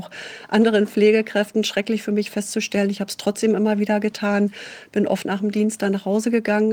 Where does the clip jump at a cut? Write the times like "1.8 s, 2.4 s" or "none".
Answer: 5.2 s